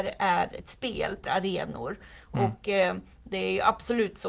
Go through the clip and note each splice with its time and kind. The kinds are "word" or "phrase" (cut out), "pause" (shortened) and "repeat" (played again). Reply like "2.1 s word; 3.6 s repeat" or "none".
1.3 s word